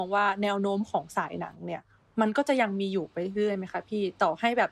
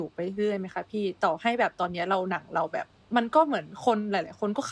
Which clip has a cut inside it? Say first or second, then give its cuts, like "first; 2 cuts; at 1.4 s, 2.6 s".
second; 1 cut; at 3.0 s